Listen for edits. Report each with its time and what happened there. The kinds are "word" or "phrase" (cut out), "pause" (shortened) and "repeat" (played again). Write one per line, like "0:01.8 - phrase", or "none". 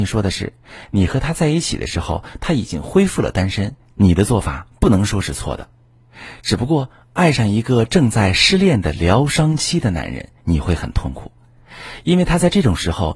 0:10.4 - pause